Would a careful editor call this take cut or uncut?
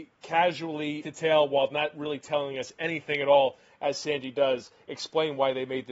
cut